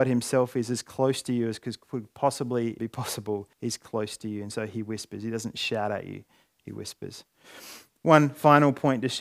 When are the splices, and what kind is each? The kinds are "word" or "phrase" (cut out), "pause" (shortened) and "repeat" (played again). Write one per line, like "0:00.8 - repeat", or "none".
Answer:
0:02.8 - word
0:03.5 - pause